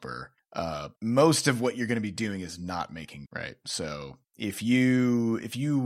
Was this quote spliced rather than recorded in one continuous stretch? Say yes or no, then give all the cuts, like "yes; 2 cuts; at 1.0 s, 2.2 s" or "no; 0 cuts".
yes; 2 cuts; at 1.0 s, 3.3 s